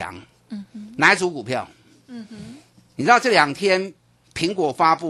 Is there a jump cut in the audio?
no; 0 cuts

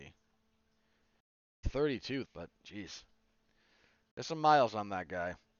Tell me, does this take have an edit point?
yes; 2 cuts; at 1.6 s, 2.2 s

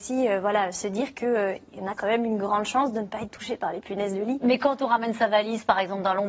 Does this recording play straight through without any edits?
yes; 0 cuts

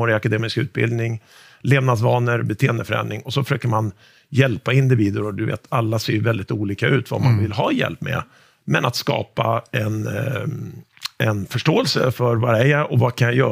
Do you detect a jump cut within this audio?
no; 0 cuts

